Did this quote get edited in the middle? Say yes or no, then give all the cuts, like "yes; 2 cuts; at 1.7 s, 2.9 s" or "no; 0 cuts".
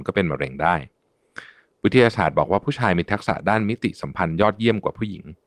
no; 0 cuts